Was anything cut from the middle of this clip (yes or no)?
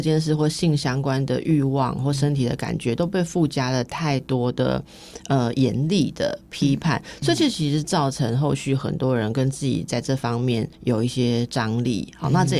yes